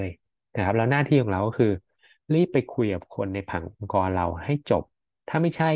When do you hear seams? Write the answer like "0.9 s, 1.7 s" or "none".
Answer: none